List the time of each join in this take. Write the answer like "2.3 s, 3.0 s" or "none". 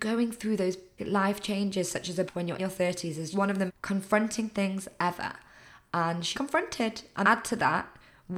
1.0 s, 2.3 s, 2.6 s, 3.3 s, 3.7 s, 6.3 s, 7.2 s

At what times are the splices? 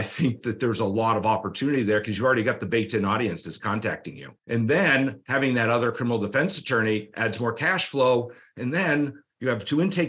4.4 s

